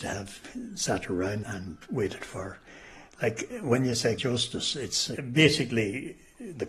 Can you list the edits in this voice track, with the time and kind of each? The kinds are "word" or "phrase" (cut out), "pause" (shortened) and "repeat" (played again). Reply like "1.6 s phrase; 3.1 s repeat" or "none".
1.4 s word; 4.2 s word